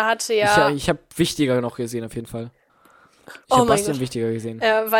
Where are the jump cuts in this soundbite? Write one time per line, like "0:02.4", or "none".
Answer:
0:03.4